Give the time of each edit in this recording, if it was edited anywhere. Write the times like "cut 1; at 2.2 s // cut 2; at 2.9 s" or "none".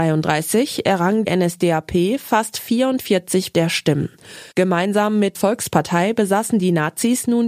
cut 1; at 1.2 s // cut 2; at 3.5 s // cut 3; at 4.5 s // cut 4; at 5.3 s